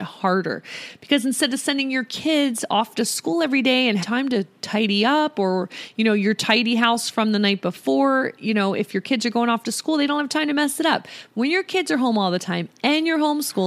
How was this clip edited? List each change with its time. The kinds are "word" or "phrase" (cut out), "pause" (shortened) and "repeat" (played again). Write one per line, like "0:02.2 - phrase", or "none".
0:04.0 - word